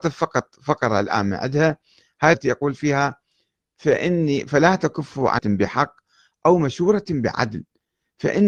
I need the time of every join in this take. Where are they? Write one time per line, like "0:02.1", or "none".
0:02.3
0:05.4